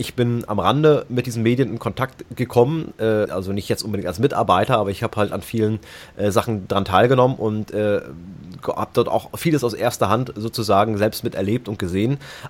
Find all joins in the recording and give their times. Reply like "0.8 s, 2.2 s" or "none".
3.3 s